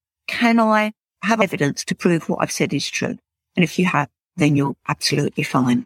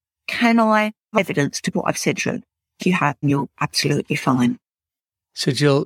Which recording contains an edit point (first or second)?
second